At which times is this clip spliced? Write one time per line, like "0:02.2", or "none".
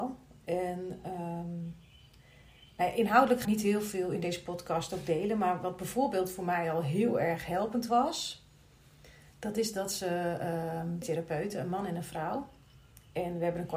0:03.4
0:11.0